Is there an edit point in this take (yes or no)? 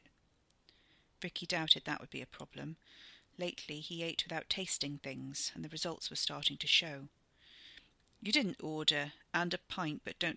yes